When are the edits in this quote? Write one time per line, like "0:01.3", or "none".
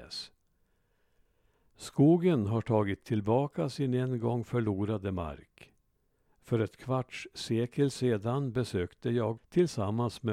0:09.4